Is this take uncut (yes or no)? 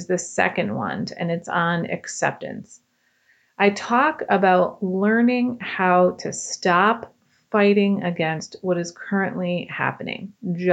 yes